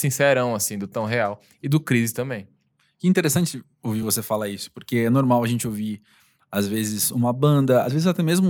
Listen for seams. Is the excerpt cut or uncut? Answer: uncut